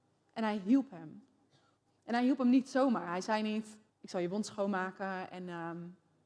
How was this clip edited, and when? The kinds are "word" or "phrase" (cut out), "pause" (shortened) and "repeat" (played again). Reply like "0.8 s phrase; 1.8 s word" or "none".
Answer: 1.8 s pause; 3.9 s pause